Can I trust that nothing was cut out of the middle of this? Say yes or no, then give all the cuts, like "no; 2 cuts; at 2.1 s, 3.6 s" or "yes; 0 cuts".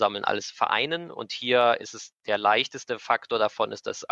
yes; 0 cuts